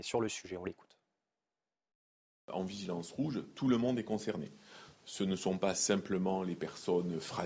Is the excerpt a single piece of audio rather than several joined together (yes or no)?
yes